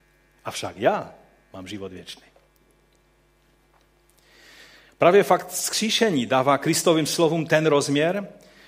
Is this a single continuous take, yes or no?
yes